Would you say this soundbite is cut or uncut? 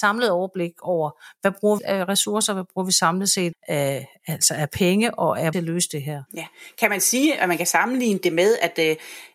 cut